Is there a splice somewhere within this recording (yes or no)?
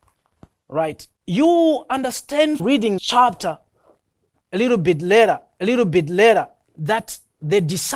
yes